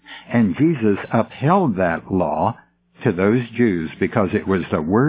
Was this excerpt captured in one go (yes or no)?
yes